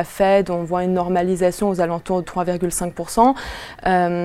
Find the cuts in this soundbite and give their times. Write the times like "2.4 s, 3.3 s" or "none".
2.2 s